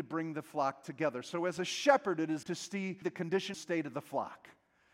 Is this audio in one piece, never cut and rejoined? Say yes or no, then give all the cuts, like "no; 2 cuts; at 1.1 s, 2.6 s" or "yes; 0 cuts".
no; 3 cuts; at 2.4 s, 3.0 s, 3.5 s